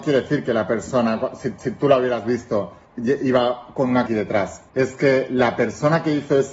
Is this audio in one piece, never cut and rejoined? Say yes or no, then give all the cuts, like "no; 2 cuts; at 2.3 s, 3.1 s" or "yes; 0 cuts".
no; 4 cuts; at 1.6 s, 2.8 s, 4.1 s, 4.7 s